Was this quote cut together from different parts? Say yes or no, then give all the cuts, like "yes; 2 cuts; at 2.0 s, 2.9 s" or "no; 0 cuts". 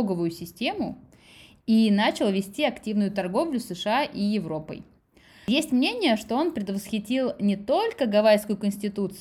no; 0 cuts